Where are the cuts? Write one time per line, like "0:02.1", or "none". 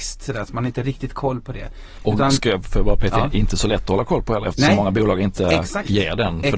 none